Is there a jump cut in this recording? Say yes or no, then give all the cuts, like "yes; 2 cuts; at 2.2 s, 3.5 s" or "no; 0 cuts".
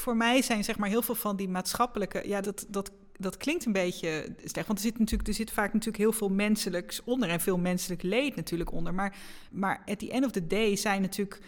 yes; 2 cuts; at 2.4 s, 9.5 s